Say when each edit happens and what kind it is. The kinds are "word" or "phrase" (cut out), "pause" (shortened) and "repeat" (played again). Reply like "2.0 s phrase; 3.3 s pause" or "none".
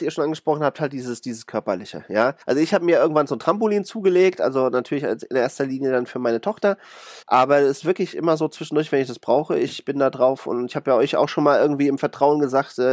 2.4 s pause; 7.2 s pause